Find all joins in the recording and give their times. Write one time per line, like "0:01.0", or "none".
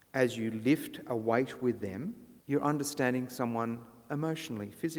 0:02.4